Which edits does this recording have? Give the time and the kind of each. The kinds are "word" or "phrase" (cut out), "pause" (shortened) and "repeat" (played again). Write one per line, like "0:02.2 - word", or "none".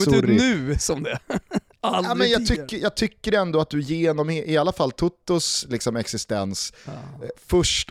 none